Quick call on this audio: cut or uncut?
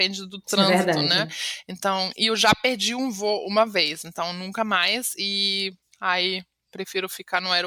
uncut